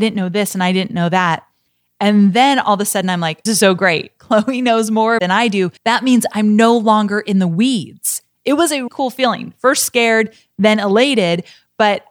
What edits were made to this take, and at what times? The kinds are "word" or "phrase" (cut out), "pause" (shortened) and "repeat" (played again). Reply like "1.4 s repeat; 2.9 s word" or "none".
3.5 s phrase; 5.2 s phrase; 5.8 s pause; 8.9 s word